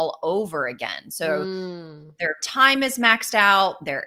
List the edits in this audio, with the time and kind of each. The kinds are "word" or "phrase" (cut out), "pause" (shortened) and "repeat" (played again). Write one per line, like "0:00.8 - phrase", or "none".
none

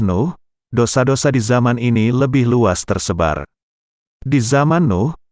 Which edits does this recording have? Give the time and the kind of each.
none

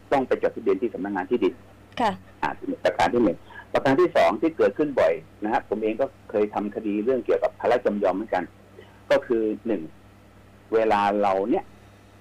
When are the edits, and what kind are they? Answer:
none

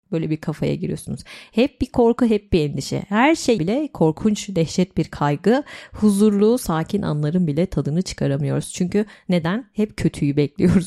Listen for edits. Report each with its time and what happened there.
0:03.6 - phrase

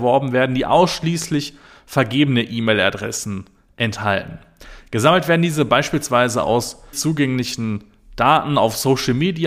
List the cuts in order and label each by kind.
0:06.9 - word

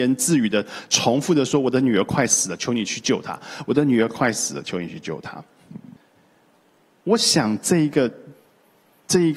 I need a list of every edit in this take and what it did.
0:06.0 - pause

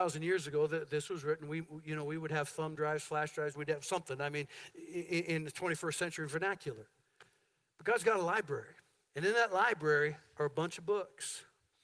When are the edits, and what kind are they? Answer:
0:03.5 - phrase

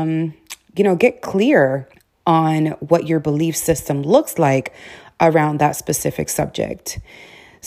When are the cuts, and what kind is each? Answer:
0:01.9 - pause

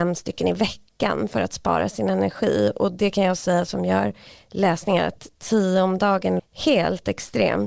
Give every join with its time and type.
0:06.4 - word

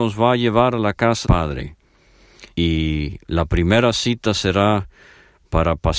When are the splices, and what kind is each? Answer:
0:01.2 - word
0:02.5 - pause

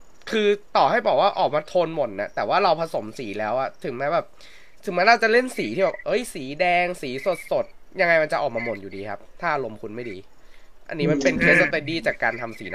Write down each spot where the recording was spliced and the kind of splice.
0:04.7 - pause

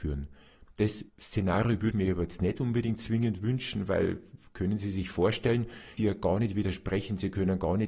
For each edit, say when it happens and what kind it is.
0:01.1 - pause
0:01.9 - word
0:06.0 - phrase

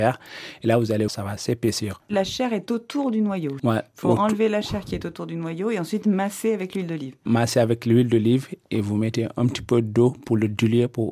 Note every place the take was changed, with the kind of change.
0:01.1 - word

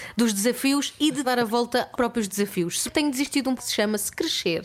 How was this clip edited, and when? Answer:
0:01.2 - word
0:01.9 - word
0:02.9 - word
0:03.6 - word

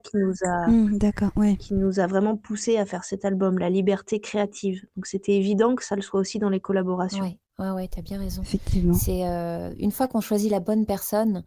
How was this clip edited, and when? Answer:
0:07.5 - pause

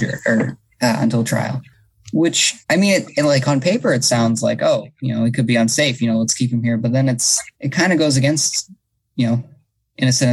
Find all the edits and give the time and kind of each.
0:02.6 - pause
0:07.5 - pause

